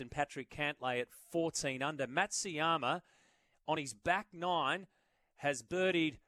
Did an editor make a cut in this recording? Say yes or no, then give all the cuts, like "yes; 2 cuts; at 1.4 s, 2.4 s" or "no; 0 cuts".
no; 0 cuts